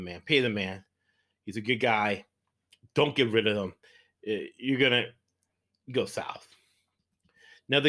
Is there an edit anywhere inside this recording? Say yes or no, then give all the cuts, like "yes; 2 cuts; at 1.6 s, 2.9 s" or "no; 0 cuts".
no; 0 cuts